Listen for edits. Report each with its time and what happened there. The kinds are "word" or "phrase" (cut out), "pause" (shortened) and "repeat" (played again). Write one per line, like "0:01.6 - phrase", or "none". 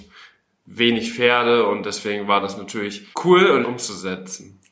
0:03.1 - pause
0:03.6 - word